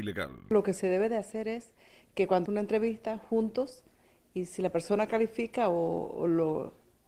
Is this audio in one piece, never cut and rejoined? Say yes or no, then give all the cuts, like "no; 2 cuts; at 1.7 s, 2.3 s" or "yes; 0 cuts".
no; 1 cut; at 2.5 s